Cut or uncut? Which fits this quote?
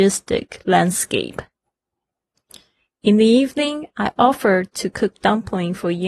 uncut